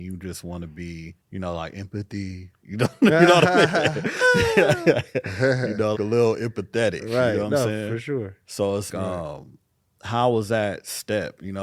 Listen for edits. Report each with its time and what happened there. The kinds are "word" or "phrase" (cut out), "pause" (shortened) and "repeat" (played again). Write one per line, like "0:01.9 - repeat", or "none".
0:01.2 - pause
0:05.9 - word
0:08.9 - word